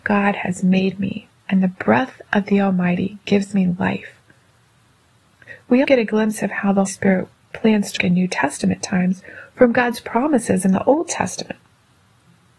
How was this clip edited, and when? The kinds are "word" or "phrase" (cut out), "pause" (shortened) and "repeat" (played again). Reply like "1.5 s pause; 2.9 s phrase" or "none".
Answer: 1.4 s pause; 5.8 s word; 6.9 s word; 8.0 s word